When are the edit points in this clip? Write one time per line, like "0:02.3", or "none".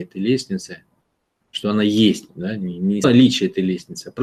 0:02.3
0:03.0